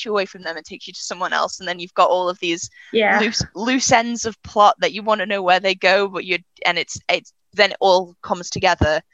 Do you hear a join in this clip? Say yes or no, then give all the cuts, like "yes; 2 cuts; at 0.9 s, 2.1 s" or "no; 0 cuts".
no; 0 cuts